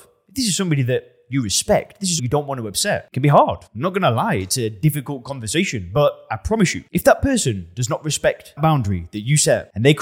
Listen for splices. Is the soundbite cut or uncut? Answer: cut